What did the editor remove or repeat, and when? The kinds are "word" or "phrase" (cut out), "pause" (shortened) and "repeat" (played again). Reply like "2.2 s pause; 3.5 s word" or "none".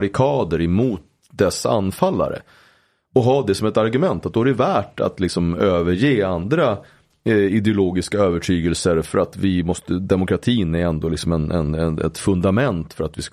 none